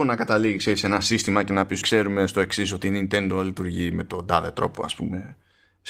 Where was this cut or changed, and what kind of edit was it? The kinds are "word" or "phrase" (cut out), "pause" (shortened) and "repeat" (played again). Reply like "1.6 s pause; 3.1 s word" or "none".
1.8 s word